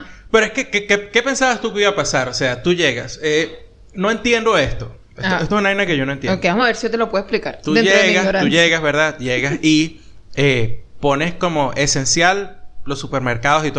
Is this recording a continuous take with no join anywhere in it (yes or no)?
yes